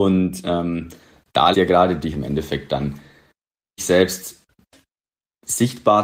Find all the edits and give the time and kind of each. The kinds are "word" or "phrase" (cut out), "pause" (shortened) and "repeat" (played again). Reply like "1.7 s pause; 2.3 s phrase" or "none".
1.5 s word; 2.1 s word; 3.8 s word